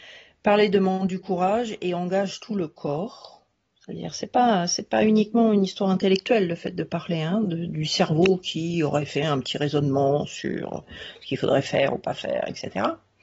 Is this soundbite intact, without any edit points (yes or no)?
yes